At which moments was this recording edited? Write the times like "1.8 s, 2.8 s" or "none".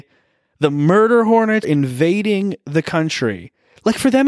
1.6 s